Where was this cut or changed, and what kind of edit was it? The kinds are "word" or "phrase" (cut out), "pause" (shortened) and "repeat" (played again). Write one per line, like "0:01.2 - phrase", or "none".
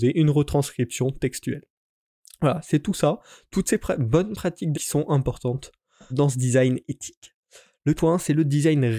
0:04.7 - word
0:06.1 - word
0:08.0 - word